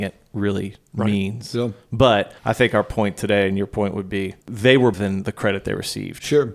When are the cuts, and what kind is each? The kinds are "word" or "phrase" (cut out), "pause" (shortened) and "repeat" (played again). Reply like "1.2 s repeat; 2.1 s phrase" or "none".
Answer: 2.4 s pause; 4.4 s pause; 4.9 s word